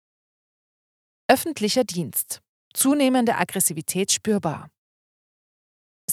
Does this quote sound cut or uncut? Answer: uncut